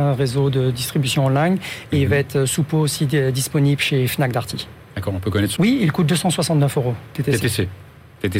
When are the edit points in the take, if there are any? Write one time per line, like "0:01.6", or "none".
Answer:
0:05.6